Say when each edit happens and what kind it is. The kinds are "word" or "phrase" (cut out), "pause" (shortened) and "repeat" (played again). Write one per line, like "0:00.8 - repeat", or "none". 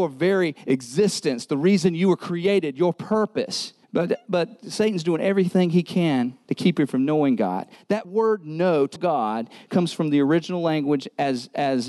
0:03.8 - pause
0:06.4 - pause
0:08.0 - word
0:09.0 - word